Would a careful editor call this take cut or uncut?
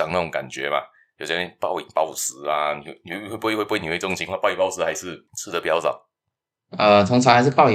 cut